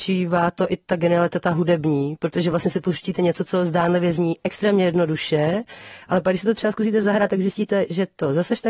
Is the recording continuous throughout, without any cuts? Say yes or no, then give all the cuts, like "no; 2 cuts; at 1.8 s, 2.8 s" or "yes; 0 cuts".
yes; 0 cuts